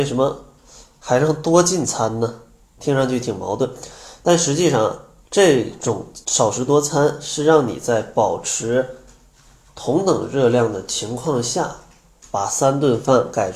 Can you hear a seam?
yes; 2 cuts; at 5.2 s, 6.2 s

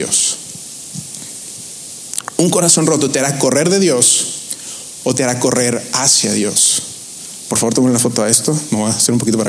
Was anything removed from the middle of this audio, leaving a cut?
no; 0 cuts

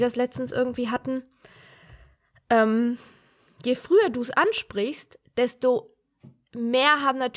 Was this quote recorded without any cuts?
yes; 0 cuts

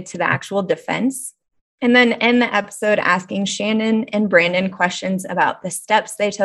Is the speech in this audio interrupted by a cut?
no; 0 cuts

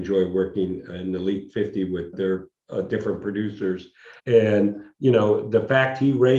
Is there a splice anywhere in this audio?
yes; 2 cuts; at 2.1 s, 4.2 s

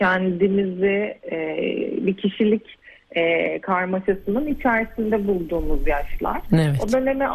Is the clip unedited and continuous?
yes; 0 cuts

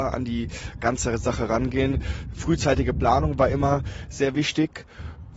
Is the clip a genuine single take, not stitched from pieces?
yes; 0 cuts

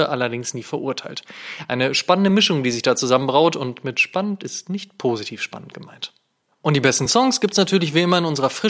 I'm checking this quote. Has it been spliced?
no; 0 cuts

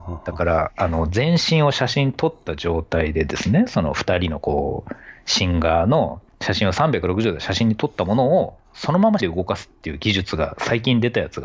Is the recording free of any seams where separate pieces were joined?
no; 2 cuts; at 6.3 s, 9.2 s

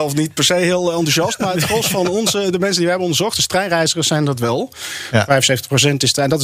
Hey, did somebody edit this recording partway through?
no; 0 cuts

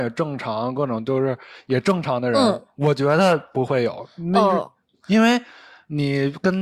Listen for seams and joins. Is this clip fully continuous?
yes; 0 cuts

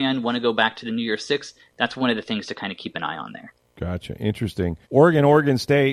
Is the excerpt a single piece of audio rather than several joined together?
no; 2 cuts; at 3.6 s, 4.8 s

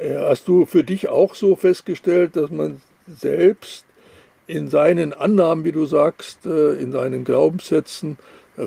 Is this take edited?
no; 0 cuts

